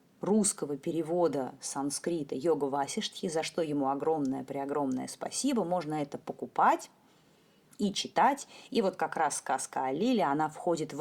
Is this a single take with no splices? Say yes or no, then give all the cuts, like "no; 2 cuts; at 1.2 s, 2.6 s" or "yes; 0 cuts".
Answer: yes; 0 cuts